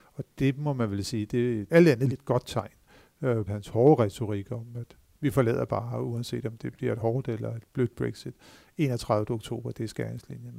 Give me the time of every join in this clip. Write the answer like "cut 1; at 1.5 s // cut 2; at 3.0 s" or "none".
cut 1; at 1.7 s // cut 2; at 2.1 s // cut 3; at 3.5 s

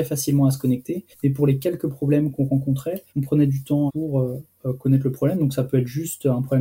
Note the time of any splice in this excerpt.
cut 1; at 1.1 s // cut 2; at 2.3 s // cut 3; at 3.1 s // cut 4; at 3.9 s

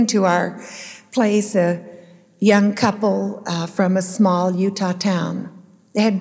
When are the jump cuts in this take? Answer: none

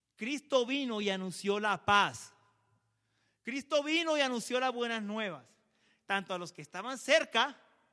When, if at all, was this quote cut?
none

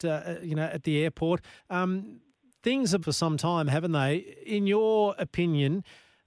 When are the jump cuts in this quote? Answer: cut 1; at 1.6 s // cut 2; at 3.0 s

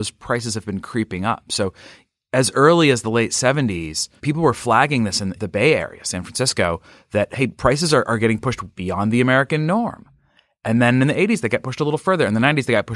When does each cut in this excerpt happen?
none

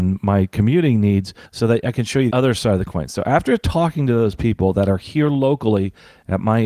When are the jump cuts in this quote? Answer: cut 1; at 1.4 s // cut 2; at 2.3 s

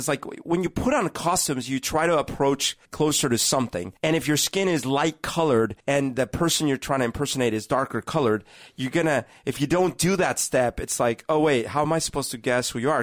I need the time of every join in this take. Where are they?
cut 1; at 2.9 s // cut 2; at 4.0 s // cut 3; at 5.8 s

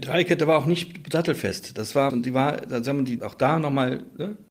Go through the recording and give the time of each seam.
cut 1; at 2.1 s // cut 2; at 3.2 s

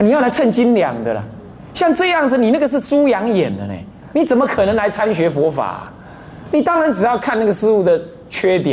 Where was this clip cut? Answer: none

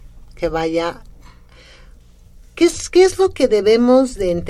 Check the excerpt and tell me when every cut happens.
none

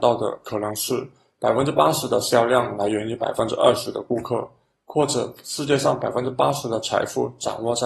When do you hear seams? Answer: none

